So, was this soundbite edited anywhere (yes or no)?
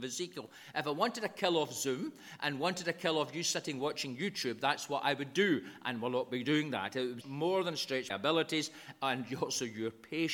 yes